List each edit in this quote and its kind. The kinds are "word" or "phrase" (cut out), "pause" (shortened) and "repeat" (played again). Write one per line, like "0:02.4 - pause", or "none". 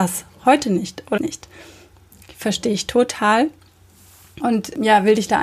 0:01.2 - word